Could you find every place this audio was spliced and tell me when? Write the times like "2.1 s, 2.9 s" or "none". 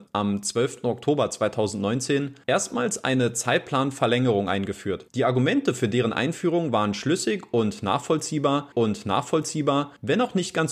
8.7 s